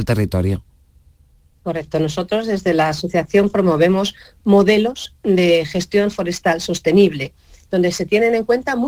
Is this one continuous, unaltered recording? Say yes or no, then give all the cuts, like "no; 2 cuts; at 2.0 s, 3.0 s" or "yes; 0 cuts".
yes; 0 cuts